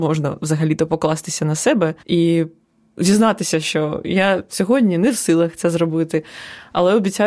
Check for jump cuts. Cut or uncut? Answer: cut